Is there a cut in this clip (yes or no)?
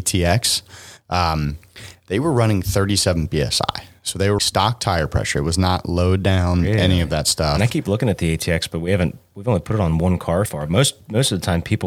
yes